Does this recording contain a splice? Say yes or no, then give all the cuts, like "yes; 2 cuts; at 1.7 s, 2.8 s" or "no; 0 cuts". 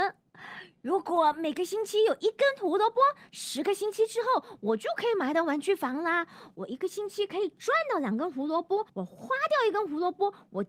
yes; 1 cut; at 8.9 s